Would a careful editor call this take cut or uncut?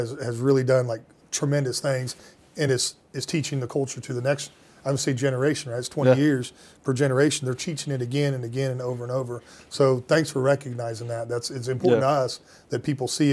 uncut